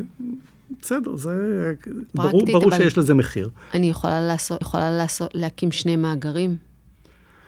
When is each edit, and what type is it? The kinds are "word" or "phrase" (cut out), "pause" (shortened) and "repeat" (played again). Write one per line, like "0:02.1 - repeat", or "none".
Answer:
0:02.1 - pause
0:04.6 - repeat